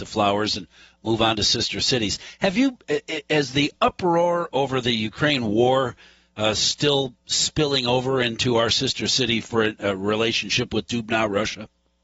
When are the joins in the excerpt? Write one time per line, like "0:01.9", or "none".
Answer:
none